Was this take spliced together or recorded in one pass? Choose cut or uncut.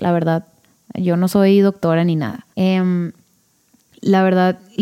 cut